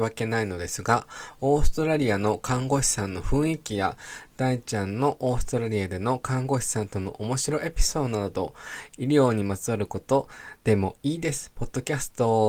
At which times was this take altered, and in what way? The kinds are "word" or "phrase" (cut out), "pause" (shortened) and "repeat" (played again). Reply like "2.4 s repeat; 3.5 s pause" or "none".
10.6 s pause